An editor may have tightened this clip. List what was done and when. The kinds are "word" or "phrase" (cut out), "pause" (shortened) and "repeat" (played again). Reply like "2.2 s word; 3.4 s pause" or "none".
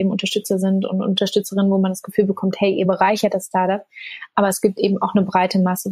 none